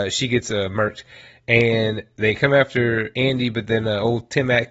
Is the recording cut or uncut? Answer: uncut